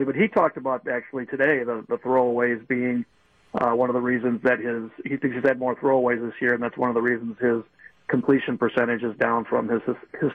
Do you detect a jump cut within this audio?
no; 0 cuts

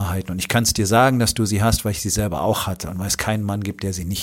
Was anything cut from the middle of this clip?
no; 0 cuts

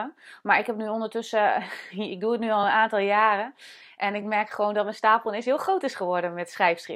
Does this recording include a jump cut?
no; 0 cuts

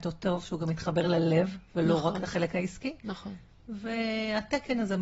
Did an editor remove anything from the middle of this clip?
no; 0 cuts

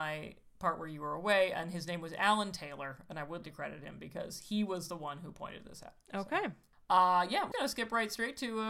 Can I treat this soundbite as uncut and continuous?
no; 2 cuts; at 3.4 s, 7.5 s

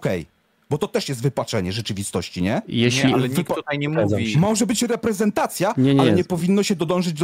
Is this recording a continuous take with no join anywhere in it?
yes; 0 cuts

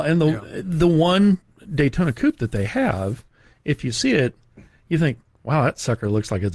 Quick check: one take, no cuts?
yes; 0 cuts

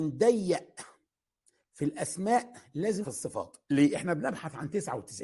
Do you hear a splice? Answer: yes; 2 cuts; at 3.0 s, 3.6 s

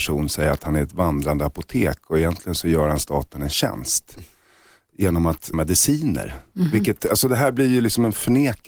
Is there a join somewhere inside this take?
yes; 1 cut; at 5.5 s

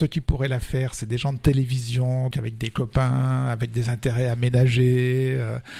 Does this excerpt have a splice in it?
yes; 1 cut; at 2.3 s

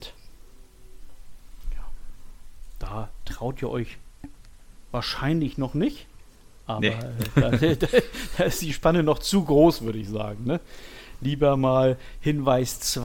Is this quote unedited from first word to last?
yes; 0 cuts

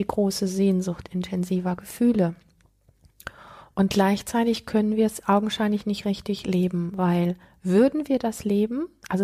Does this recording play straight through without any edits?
yes; 0 cuts

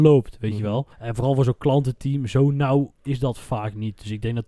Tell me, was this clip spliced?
yes; 1 cut; at 0.9 s

